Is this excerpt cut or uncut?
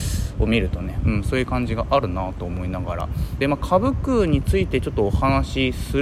cut